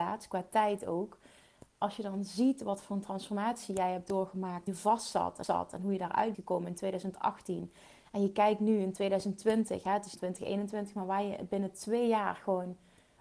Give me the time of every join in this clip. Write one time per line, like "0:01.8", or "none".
0:04.7
0:05.4
0:06.3
0:10.2